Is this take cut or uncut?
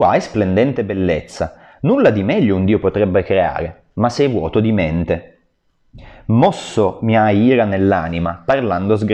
uncut